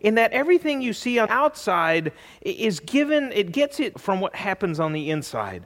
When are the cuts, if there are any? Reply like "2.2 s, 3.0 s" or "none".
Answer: 1.3 s, 3.9 s